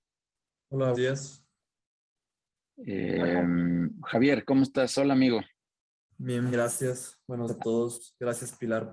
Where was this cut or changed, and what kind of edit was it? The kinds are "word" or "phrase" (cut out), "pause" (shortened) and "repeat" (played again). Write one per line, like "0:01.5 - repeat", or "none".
0:00.9 - word
0:06.5 - word
0:07.5 - word

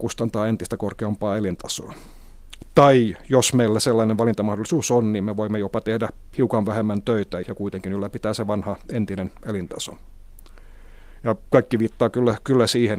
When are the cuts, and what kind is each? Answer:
0:07.4 - word

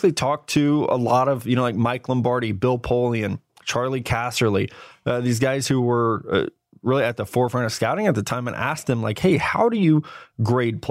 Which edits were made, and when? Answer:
none

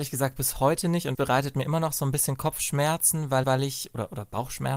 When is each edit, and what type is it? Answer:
0:01.1 - word
0:03.4 - repeat

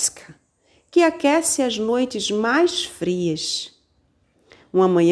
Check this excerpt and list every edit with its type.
none

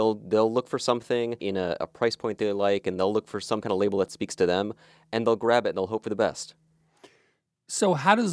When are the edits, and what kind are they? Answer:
none

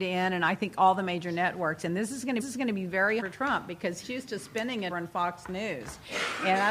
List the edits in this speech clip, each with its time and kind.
0:02.4 - repeat
0:03.2 - word
0:04.0 - word
0:04.9 - word

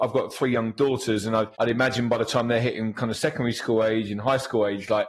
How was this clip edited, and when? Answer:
0:01.5 - pause

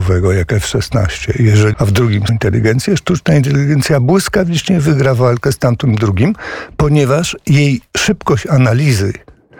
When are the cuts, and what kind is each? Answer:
0:01.7 - phrase
0:02.3 - word

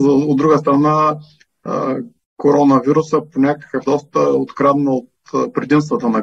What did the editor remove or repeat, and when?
0:03.8 - word

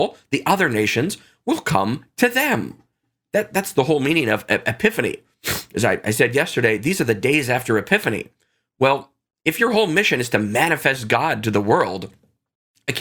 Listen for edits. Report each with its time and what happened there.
none

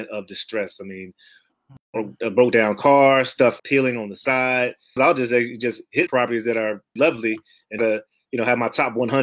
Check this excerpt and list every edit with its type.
0:03.6 - word
0:05.0 - word
0:06.1 - word
0:07.0 - word
0:07.8 - word

